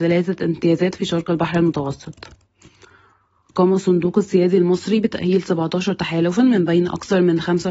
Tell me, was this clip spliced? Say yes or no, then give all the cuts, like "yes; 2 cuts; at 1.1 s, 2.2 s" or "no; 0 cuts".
no; 0 cuts